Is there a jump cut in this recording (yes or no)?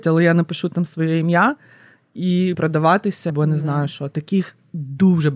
yes